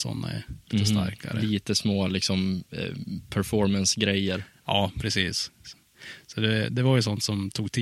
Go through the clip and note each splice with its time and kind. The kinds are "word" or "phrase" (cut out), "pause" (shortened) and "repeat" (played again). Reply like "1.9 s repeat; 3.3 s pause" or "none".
none